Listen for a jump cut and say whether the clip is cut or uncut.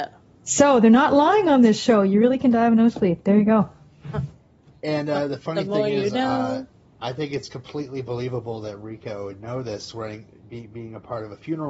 uncut